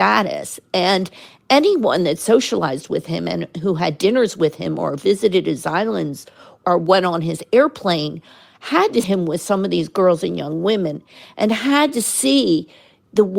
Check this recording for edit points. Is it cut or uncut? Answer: cut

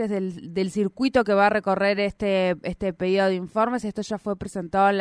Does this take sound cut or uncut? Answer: uncut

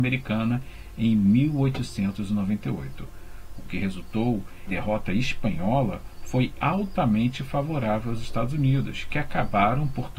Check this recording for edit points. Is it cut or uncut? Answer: cut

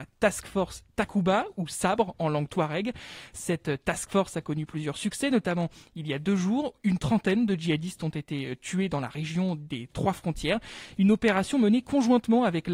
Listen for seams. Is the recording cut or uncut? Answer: uncut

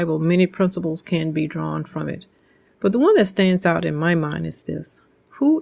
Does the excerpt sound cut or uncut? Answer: uncut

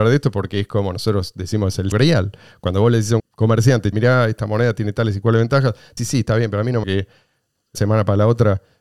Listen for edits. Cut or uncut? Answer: cut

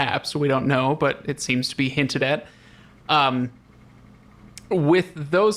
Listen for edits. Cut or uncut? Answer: uncut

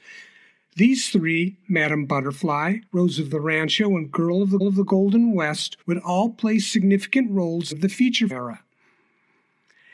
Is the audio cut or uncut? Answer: cut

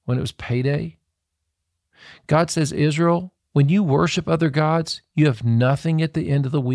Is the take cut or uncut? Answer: uncut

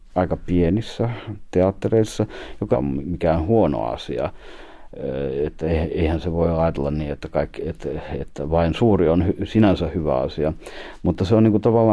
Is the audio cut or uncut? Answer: cut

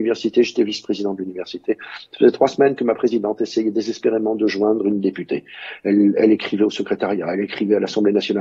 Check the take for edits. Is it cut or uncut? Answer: uncut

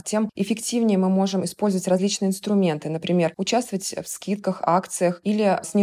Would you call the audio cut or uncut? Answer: uncut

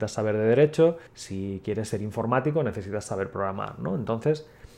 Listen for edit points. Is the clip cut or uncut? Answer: cut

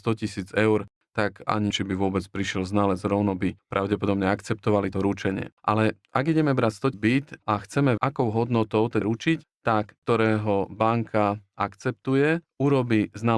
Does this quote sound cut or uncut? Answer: cut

